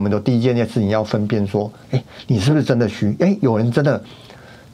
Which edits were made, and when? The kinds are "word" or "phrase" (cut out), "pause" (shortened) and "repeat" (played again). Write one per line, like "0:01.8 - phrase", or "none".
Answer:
0:01.8 - pause